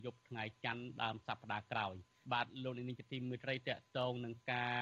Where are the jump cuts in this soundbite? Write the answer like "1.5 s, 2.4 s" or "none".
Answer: 2.2 s